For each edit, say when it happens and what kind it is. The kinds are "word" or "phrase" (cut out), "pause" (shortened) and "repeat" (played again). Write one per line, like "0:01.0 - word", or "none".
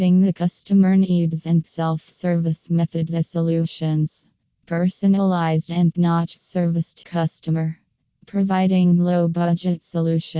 0:01.6 - word
0:05.9 - word
0:07.0 - word